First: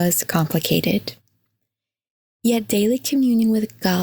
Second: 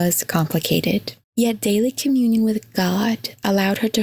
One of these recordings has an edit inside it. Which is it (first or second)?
second